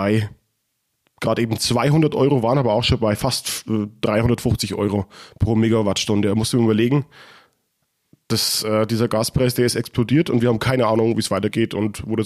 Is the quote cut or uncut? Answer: uncut